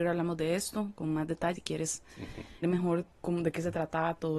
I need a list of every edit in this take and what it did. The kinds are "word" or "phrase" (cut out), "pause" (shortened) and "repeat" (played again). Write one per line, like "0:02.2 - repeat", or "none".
0:01.6 - word
0:02.6 - word
0:03.1 - pause